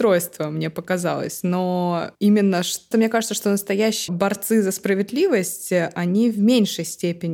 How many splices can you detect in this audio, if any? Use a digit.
3